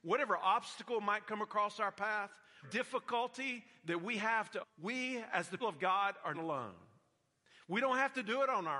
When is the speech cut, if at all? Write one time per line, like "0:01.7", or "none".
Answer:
0:02.6
0:04.6
0:05.6
0:06.3

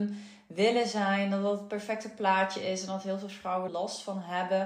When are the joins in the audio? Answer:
0:03.7

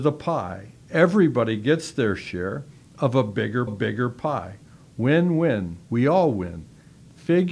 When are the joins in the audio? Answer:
0:03.7
0:05.8

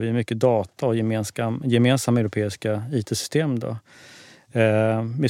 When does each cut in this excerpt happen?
none

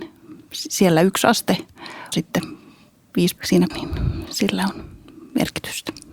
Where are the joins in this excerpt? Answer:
0:02.1
0:03.4
0:03.7

